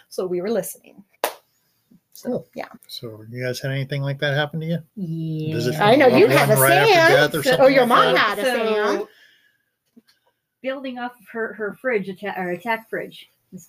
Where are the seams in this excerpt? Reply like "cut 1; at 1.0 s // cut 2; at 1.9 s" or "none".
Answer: cut 1; at 1.1 s // cut 2; at 2.8 s // cut 3; at 4.9 s